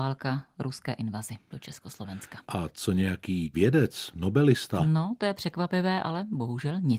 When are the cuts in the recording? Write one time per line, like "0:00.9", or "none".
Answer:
0:03.5